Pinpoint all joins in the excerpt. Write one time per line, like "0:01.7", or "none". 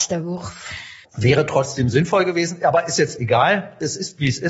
0:01.0